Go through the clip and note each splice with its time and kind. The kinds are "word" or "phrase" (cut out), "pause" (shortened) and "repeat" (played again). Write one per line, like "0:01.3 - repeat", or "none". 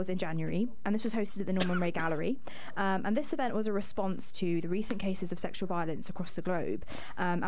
none